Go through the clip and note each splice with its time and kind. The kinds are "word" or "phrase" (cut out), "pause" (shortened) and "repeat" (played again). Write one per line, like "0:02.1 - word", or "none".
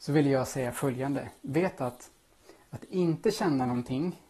none